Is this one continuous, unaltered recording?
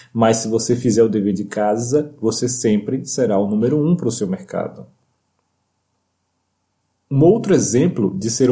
yes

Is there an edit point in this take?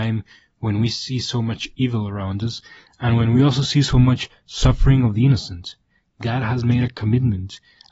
no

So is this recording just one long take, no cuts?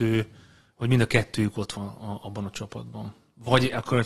no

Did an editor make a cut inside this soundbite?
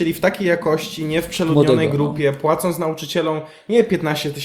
no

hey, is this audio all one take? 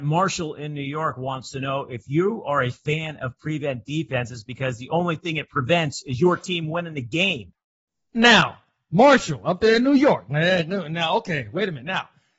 yes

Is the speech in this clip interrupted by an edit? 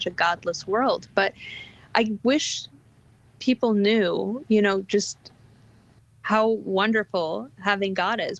no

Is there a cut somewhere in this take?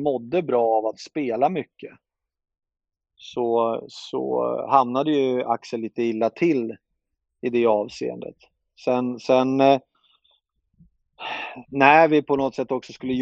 no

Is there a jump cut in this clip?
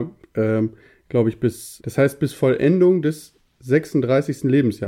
yes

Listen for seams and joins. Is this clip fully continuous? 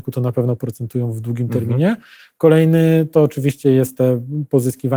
yes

